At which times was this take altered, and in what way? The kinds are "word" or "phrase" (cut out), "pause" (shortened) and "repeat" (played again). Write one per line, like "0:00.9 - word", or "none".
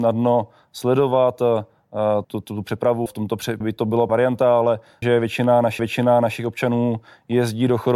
0:02.2 - word
0:03.1 - word
0:03.6 - word
0:04.1 - word
0:05.0 - phrase
0:05.8 - repeat